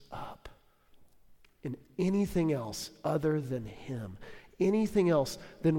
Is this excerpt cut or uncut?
uncut